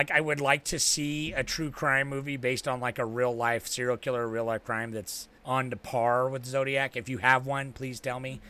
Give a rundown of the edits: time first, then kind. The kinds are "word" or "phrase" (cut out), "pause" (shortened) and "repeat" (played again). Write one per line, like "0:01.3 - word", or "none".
0:05.4 - pause